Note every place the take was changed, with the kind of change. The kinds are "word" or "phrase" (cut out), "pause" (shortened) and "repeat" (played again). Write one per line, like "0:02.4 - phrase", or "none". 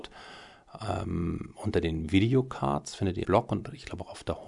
0:03.2 - word